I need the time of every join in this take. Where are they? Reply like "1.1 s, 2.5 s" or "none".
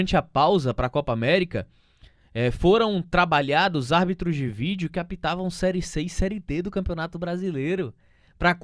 none